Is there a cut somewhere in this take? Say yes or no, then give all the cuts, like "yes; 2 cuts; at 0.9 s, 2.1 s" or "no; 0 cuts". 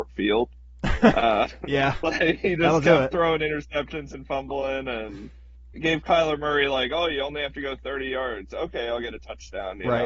yes; 1 cut; at 5.7 s